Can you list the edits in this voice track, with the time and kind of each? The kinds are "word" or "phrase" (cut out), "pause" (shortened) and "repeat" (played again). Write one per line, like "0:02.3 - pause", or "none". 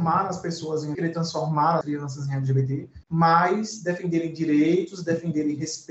0:00.9 - word
0:01.8 - word
0:03.0 - pause